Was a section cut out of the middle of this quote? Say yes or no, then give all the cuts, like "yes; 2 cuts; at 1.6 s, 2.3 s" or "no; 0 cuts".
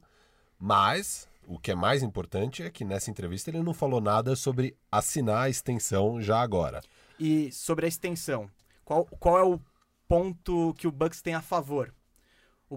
no; 0 cuts